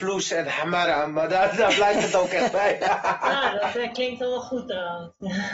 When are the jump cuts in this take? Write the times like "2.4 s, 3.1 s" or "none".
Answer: none